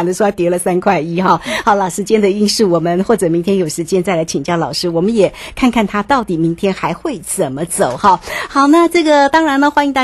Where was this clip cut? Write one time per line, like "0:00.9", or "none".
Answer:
none